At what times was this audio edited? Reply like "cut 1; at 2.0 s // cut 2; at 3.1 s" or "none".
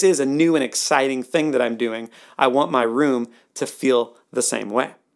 none